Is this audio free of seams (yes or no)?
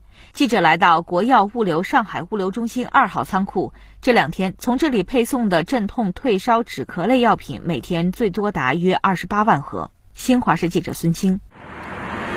yes